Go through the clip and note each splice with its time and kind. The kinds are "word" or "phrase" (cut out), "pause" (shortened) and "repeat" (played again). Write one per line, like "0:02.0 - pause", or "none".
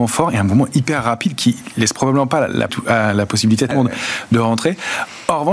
0:02.7 - word
0:03.7 - word